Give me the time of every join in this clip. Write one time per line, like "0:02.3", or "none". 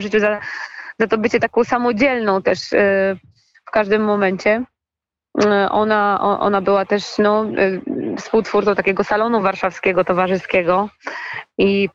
none